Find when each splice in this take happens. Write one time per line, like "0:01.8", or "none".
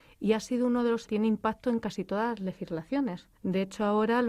0:01.1
0:03.4

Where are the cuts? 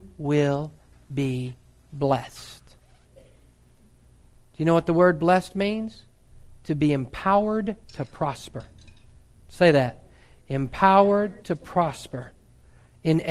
0:07.8

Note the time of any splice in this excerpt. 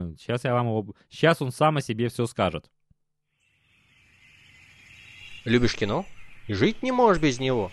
none

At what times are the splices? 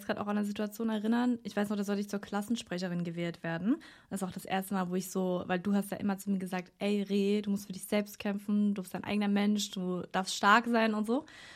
none

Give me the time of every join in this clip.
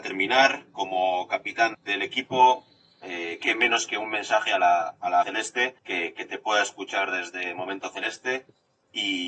0:01.7
0:05.2
0:05.8

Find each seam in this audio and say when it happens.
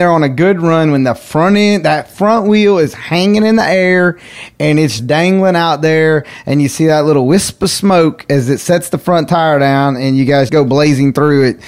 0:05.0
0:10.5

